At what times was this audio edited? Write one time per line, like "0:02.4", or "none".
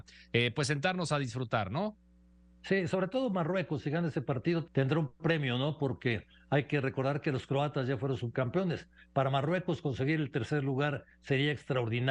0:04.7